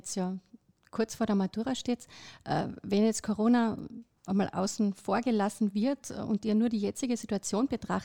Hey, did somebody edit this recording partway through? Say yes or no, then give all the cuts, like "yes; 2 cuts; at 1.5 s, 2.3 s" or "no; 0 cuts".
no; 0 cuts